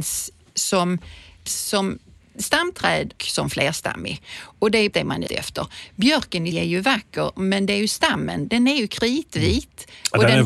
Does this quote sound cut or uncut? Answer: cut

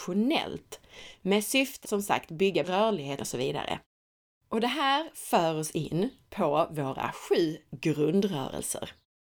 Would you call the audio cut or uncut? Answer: cut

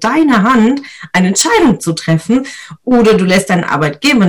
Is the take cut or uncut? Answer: uncut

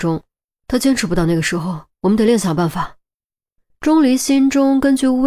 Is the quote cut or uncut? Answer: uncut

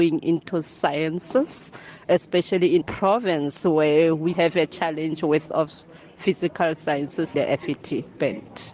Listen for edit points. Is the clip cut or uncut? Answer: cut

